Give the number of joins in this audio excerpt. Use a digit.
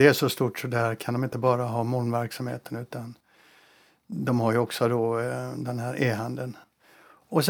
0